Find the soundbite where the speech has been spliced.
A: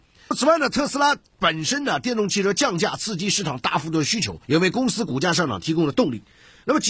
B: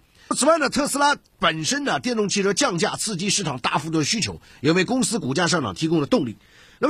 A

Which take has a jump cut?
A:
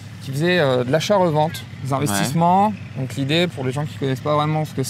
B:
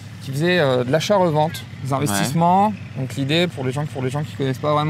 B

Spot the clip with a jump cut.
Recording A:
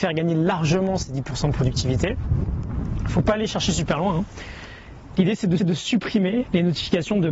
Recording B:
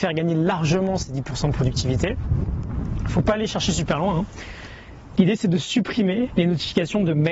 A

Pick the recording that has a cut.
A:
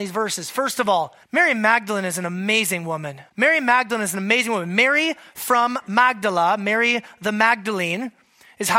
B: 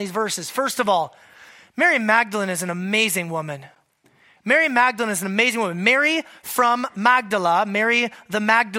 A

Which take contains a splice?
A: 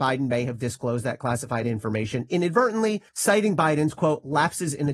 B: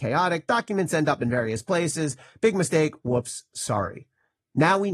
A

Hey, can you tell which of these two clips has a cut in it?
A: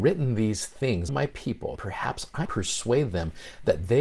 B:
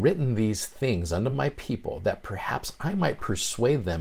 A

